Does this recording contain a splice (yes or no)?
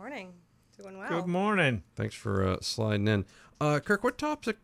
no